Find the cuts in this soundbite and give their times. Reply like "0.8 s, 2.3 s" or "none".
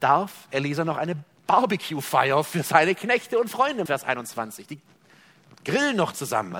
3.9 s